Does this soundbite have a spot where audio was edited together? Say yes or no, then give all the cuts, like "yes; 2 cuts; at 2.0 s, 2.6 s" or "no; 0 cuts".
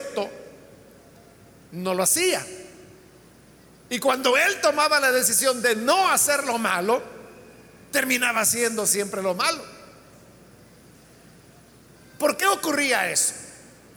no; 0 cuts